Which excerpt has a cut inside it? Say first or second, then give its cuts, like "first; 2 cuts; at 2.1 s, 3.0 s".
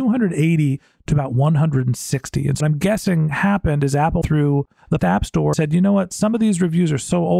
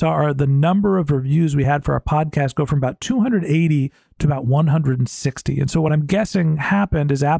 first; 4 cuts; at 2.6 s, 4.2 s, 5.0 s, 5.5 s